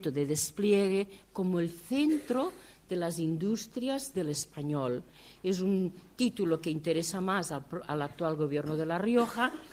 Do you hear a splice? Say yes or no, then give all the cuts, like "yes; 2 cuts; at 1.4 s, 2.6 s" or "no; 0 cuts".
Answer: no; 0 cuts